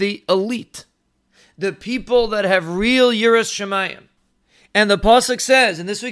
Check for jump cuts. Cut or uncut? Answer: uncut